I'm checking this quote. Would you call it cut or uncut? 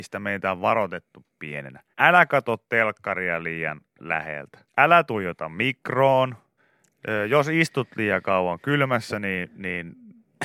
cut